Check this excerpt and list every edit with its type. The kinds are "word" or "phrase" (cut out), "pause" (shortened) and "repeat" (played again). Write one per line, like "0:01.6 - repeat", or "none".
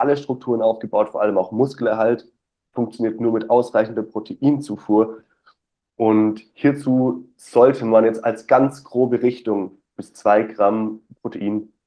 0:10.0 - word